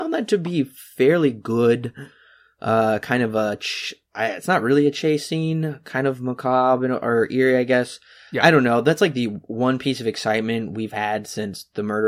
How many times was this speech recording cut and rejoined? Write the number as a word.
zero